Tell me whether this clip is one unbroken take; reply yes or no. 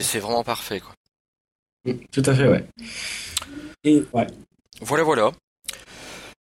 no